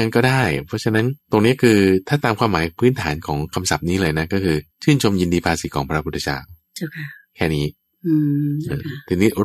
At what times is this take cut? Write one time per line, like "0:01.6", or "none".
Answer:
0:01.2
0:04.7